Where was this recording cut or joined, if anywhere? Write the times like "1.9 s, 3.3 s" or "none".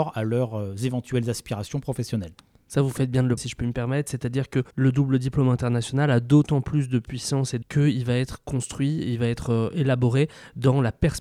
3.4 s, 4.7 s, 7.6 s